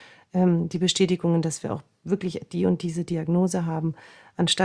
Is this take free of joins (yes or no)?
yes